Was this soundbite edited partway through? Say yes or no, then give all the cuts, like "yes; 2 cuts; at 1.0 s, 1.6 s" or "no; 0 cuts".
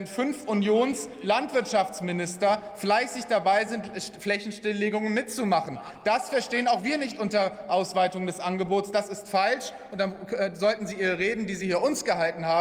no; 0 cuts